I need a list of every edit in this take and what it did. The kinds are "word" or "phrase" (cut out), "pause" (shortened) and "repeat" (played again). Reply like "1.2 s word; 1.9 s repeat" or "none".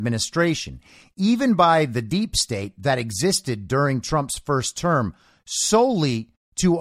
none